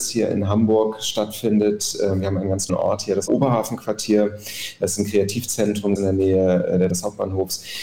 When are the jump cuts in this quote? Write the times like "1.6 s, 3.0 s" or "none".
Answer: 2.7 s, 3.3 s, 6.0 s, 6.9 s